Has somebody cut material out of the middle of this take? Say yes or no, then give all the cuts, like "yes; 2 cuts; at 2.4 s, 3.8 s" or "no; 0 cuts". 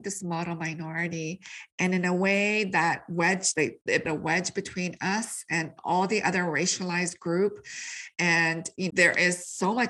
yes; 4 cuts; at 3.5 s, 4.0 s, 5.8 s, 8.9 s